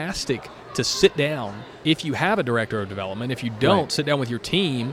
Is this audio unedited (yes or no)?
yes